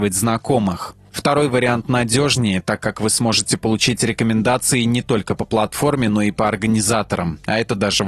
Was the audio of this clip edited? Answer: no; 0 cuts

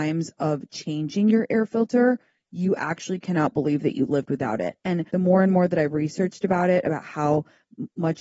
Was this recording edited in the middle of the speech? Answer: yes; 1 cut; at 5.1 s

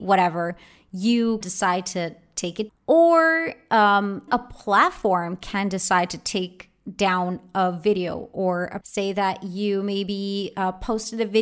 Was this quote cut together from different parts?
yes; 4 cuts; at 1.4 s, 2.7 s, 4.3 s, 8.8 s

